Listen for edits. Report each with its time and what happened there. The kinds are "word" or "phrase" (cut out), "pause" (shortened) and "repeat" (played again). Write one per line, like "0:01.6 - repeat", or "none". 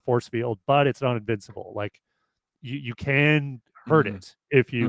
none